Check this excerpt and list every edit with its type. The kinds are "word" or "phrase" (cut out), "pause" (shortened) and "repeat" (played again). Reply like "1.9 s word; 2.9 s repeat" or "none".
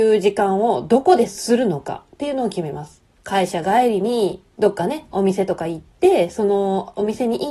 3.1 s pause; 4.5 s pause

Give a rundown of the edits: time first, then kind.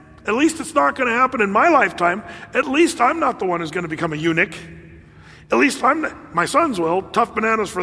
none

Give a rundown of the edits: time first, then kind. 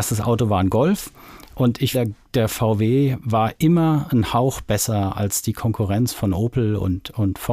1.9 s word; 2.2 s pause

